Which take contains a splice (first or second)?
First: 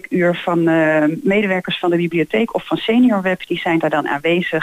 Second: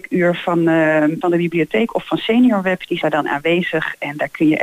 second